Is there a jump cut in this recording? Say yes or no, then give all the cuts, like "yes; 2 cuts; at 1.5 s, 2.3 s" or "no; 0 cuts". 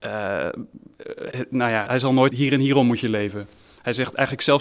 yes; 3 cuts; at 1.3 s, 1.9 s, 2.3 s